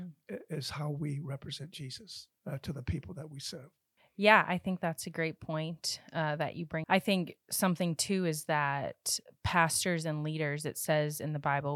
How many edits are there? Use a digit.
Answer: 2